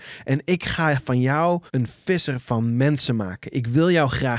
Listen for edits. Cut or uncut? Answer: cut